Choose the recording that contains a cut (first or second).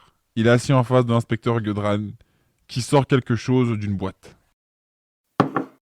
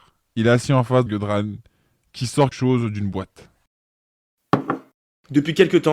second